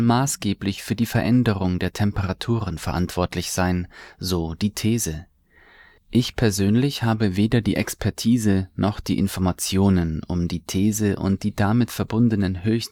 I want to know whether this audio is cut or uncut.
uncut